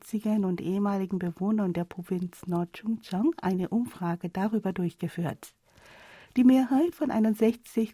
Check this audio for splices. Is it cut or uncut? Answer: uncut